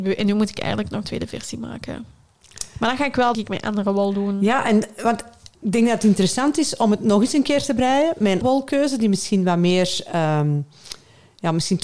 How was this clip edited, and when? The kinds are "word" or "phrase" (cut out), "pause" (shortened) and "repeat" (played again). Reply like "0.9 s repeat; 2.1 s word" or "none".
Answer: 1.0 s word; 3.3 s word; 5.5 s pause; 8.4 s word

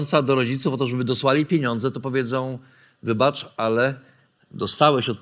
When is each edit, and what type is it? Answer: none

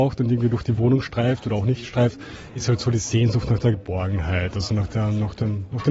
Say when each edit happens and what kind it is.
none

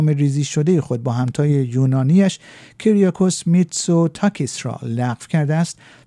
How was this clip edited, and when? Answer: none

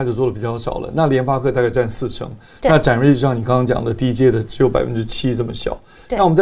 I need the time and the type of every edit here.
none

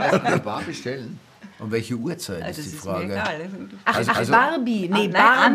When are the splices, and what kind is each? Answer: 1.5 s pause; 4.1 s repeat

